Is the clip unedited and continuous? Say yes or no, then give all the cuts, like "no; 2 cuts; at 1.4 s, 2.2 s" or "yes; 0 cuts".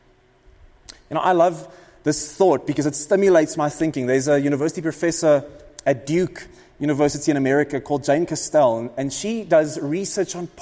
yes; 0 cuts